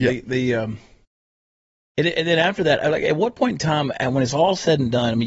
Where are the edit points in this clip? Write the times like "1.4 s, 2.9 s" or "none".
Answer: none